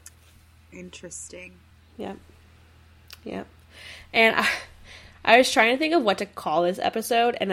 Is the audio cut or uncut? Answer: cut